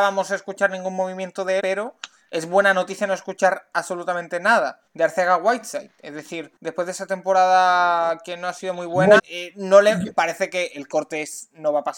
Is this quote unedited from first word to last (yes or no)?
no